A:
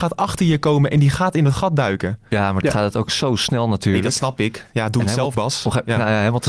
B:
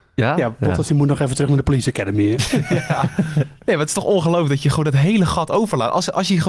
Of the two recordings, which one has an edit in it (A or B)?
A